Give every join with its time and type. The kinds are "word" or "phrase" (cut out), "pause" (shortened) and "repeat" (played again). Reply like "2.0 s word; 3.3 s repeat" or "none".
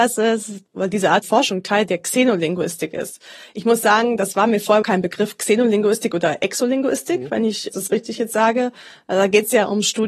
1.2 s word; 4.8 s word; 7.7 s word